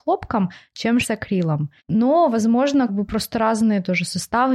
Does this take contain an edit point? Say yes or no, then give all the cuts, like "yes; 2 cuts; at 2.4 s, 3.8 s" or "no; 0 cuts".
yes; 3 cuts; at 1.0 s, 1.8 s, 2.9 s